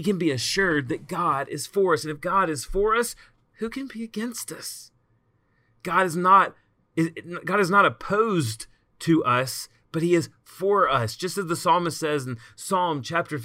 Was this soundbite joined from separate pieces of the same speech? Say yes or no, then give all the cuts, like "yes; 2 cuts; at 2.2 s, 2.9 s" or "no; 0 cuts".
no; 0 cuts